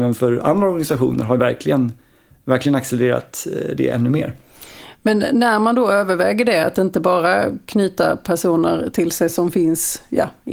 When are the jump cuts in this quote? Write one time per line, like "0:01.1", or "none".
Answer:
none